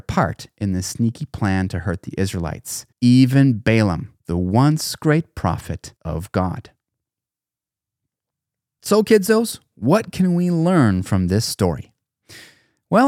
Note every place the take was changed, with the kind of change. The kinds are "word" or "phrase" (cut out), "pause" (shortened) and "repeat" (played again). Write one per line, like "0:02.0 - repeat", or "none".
0:02.9 - pause
0:04.2 - pause
0:06.0 - pause